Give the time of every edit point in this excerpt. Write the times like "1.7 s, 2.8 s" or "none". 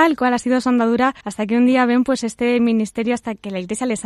1.2 s